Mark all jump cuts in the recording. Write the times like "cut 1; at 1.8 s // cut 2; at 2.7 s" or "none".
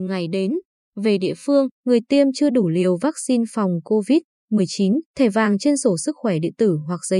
cut 1; at 1.7 s // cut 2; at 5.1 s